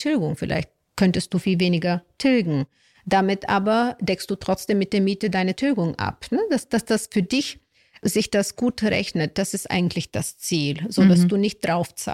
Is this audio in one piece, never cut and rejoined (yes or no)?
no